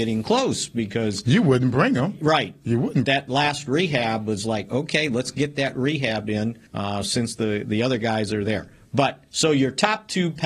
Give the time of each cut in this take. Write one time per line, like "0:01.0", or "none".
0:03.0
0:06.7
0:09.3